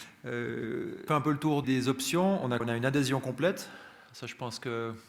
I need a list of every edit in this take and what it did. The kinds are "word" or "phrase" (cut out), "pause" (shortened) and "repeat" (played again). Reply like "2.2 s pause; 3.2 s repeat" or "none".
1.1 s phrase; 1.6 s word; 2.6 s word